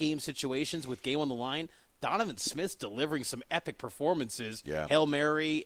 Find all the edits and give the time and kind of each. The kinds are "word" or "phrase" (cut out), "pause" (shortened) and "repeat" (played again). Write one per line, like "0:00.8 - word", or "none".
none